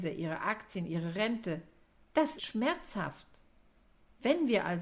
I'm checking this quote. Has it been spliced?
yes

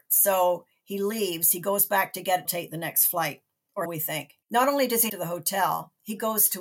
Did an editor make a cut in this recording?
yes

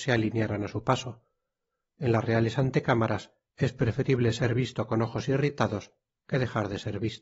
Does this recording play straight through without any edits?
yes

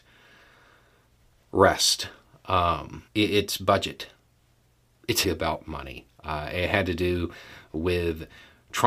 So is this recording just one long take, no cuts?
no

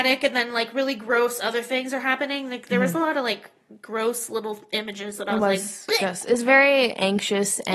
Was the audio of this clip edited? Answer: no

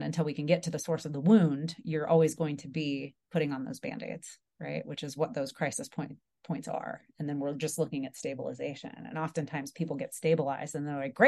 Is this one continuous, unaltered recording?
no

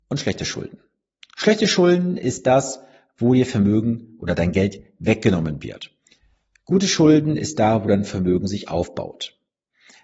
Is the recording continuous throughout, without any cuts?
yes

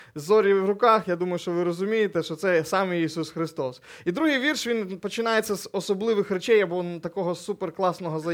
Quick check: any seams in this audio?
no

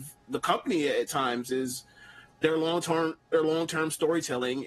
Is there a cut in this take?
no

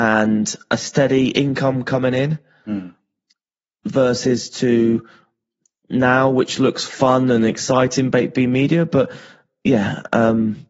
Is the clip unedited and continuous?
yes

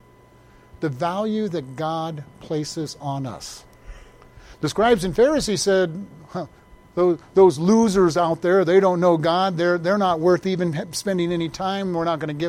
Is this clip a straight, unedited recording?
yes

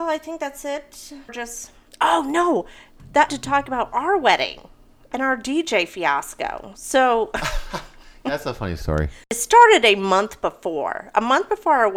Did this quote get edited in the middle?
yes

